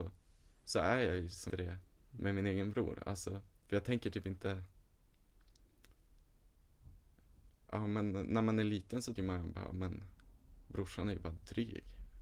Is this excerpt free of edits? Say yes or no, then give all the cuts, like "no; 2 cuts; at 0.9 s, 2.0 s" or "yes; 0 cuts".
no; 3 cuts; at 1.5 s, 3.6 s, 9.2 s